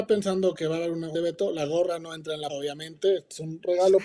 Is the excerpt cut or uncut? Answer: cut